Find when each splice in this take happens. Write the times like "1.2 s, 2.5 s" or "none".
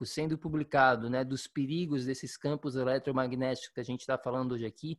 none